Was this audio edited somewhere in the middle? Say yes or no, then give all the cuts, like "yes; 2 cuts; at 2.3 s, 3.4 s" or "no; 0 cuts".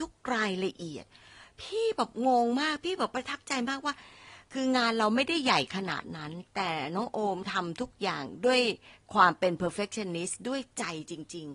no; 0 cuts